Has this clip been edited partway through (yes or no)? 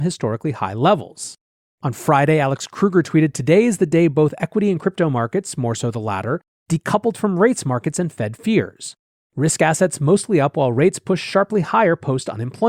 no